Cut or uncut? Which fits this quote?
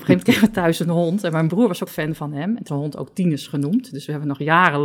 cut